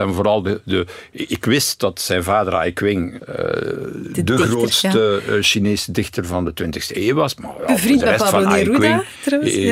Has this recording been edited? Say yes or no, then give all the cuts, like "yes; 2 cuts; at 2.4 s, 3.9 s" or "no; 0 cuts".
no; 0 cuts